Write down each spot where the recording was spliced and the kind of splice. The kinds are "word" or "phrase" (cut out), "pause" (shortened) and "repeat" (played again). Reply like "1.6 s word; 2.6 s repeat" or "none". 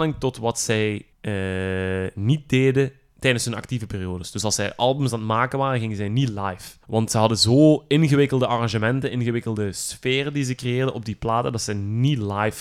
1.1 s pause; 6.8 s pause